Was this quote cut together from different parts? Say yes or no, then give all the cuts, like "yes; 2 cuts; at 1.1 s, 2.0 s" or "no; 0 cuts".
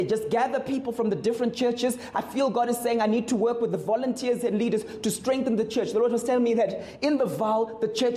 no; 0 cuts